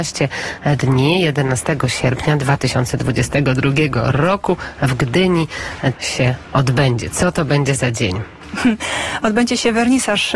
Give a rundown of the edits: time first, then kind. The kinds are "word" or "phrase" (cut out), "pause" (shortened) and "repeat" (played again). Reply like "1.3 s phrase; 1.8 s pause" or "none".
6.0 s word